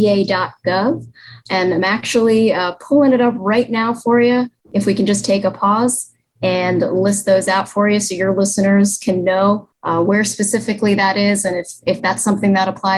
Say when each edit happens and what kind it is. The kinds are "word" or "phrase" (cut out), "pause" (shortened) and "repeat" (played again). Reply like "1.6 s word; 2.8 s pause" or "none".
4.6 s pause; 9.7 s pause